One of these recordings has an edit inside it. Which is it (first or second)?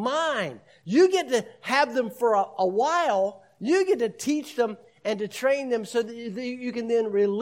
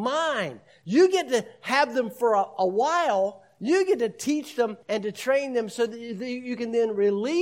second